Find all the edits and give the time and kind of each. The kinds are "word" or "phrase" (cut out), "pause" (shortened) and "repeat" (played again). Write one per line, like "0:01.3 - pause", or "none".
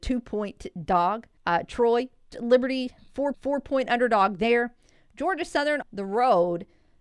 0:01.4 - pause
0:02.3 - word
0:03.3 - repeat
0:05.8 - word